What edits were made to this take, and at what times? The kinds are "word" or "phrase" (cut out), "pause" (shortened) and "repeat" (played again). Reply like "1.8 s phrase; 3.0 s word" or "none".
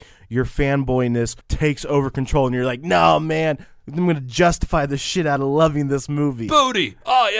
1.4 s pause